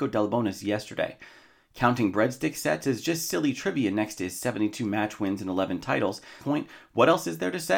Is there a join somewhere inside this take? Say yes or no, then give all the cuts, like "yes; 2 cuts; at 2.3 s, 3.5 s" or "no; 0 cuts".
yes; 1 cut; at 6.4 s